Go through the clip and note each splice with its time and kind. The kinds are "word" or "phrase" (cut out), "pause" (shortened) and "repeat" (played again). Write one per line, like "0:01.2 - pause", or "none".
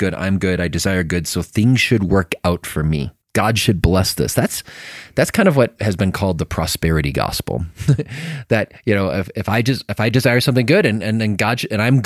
0:03.2 - pause
0:05.8 - phrase
0:08.8 - pause